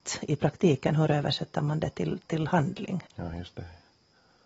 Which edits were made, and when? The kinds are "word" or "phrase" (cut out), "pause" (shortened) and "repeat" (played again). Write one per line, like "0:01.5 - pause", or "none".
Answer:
0:03.1 - pause